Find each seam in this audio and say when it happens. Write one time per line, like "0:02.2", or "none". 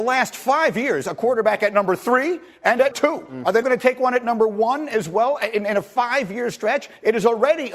0:02.9
0:03.6